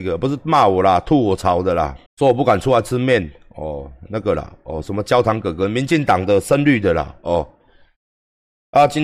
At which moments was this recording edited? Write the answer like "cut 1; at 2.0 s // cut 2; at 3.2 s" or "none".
cut 1; at 2.1 s